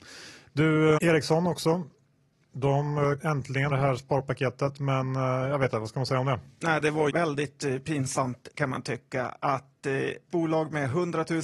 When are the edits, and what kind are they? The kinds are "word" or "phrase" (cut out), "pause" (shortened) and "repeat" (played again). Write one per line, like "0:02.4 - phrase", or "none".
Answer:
0:01.0 - word
0:03.2 - word
0:03.7 - word
0:05.7 - word
0:07.1 - word
0:08.5 - word
0:10.3 - word